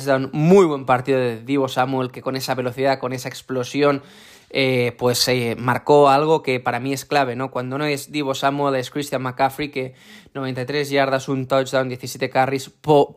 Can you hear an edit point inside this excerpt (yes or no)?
no